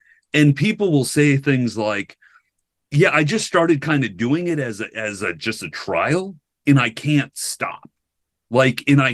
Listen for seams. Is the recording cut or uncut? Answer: uncut